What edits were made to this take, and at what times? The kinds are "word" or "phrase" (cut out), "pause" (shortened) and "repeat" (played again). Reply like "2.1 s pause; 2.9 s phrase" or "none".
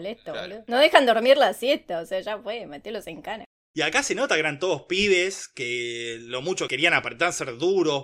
none